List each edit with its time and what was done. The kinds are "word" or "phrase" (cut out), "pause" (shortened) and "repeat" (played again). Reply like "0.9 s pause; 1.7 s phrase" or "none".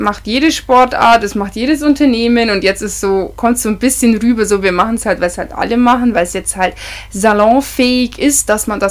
none

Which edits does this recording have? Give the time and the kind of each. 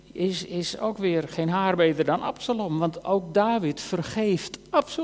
none

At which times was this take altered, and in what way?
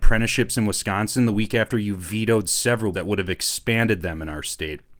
2.9 s word

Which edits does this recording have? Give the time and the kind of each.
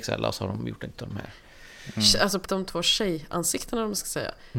0.9 s word; 2.5 s word

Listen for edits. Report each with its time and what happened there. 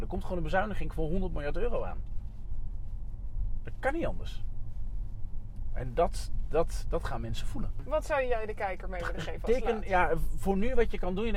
none

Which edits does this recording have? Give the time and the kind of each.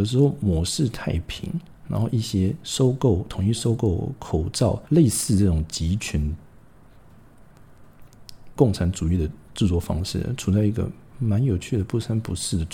4.9 s pause; 8.6 s word

